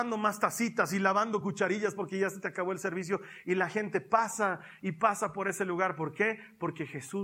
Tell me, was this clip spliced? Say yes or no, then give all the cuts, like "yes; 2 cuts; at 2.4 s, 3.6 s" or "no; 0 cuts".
no; 0 cuts